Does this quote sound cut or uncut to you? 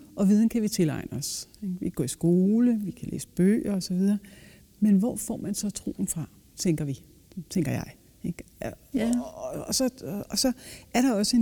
uncut